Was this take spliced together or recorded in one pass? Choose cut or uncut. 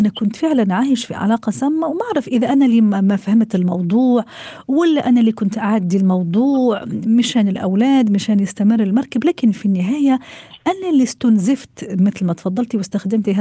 uncut